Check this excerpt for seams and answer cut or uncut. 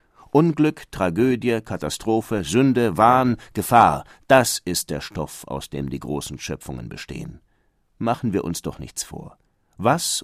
uncut